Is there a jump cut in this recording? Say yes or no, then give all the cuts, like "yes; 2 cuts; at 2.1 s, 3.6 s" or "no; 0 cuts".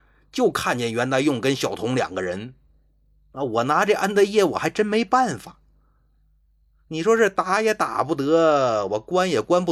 no; 0 cuts